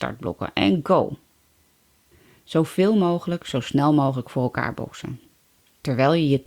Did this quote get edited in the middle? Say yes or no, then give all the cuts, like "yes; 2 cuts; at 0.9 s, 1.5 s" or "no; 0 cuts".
no; 0 cuts